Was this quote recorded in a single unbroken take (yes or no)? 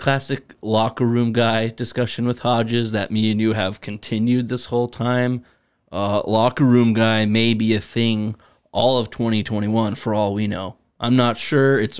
yes